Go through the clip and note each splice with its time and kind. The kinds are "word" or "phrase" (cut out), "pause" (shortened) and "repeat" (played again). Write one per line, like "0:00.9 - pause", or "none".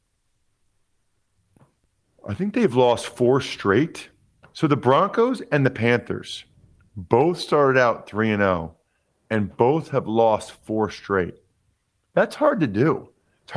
none